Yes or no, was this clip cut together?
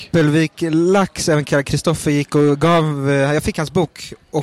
no